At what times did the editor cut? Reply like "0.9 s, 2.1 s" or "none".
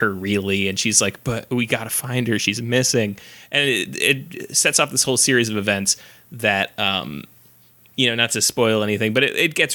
none